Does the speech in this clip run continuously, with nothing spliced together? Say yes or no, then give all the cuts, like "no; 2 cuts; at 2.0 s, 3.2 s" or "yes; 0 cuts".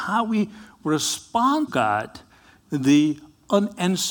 no; 2 cuts; at 1.7 s, 2.7 s